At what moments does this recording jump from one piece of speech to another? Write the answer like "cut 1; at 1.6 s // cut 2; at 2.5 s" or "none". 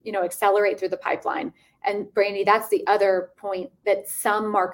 none